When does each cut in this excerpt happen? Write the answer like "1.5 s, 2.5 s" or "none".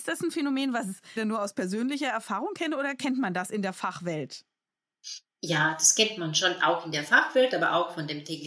1.2 s